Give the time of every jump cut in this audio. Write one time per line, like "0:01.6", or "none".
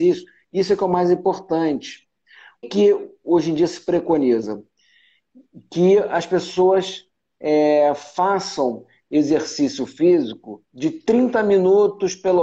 0:02.6
0:10.7